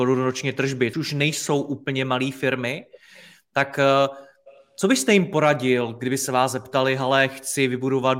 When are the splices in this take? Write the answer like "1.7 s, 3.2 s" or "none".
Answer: 0.9 s